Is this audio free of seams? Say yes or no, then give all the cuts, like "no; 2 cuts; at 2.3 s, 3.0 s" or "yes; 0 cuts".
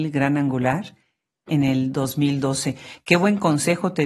yes; 0 cuts